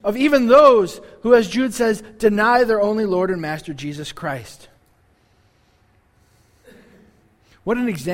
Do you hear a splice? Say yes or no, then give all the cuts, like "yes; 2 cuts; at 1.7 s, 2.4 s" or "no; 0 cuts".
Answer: no; 0 cuts